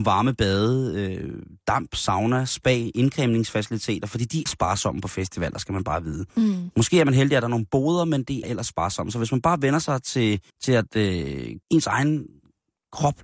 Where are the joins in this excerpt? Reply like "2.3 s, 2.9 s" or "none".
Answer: 4.5 s, 6.3 s, 8.4 s, 10.5 s, 11.6 s